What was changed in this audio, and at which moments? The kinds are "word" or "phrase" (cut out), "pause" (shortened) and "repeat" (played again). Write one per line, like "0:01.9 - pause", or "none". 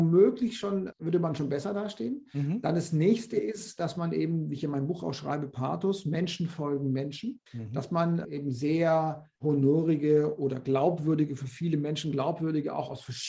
0:07.5 - pause